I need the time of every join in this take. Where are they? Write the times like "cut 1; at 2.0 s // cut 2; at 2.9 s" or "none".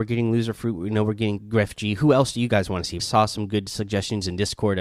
cut 1; at 1.4 s // cut 2; at 3.0 s